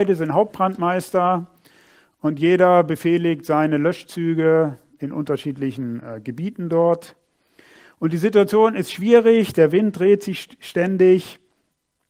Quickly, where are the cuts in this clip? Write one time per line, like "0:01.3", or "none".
none

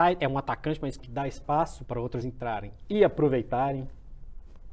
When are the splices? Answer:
0:01.0
0:01.9
0:02.2

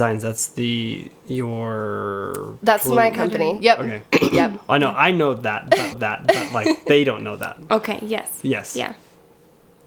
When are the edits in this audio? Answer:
0:05.9

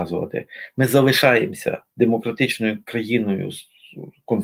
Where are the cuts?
none

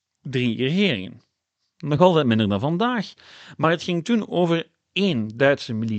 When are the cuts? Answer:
none

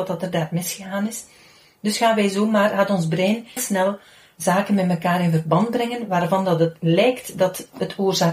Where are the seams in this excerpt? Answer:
0:03.6

